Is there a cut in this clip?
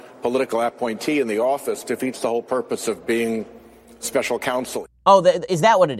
no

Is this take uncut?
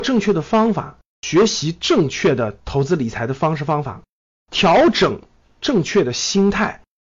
yes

